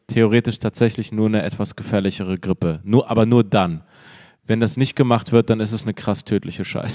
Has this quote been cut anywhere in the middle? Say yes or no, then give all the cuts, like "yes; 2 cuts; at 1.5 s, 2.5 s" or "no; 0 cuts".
no; 0 cuts